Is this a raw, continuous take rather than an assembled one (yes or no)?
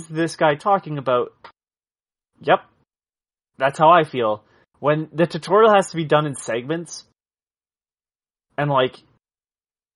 yes